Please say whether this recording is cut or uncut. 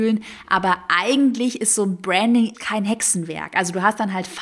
cut